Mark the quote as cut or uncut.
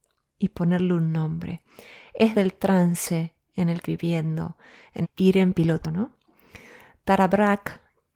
cut